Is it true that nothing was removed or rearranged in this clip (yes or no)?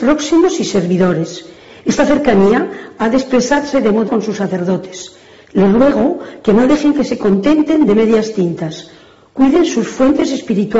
no